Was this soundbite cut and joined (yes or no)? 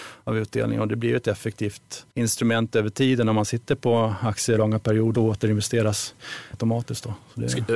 yes